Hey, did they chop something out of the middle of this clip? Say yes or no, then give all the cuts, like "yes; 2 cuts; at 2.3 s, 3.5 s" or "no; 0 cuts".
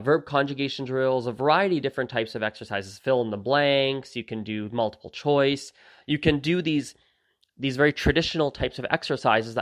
no; 0 cuts